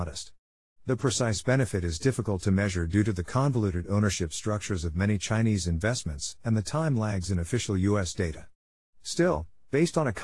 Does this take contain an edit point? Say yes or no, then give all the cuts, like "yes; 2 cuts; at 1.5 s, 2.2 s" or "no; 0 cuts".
no; 0 cuts